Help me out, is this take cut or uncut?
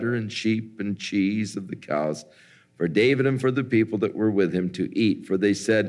uncut